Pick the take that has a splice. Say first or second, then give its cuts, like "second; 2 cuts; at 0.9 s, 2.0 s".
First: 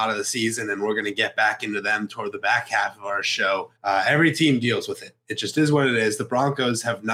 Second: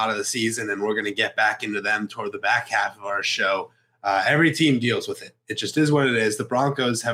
first; 1 cut; at 3.8 s